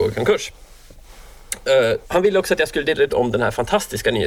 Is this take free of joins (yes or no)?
no